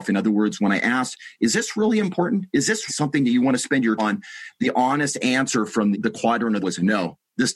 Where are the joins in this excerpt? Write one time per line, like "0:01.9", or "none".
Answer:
0:02.5
0:02.9
0:04.0
0:05.9
0:06.6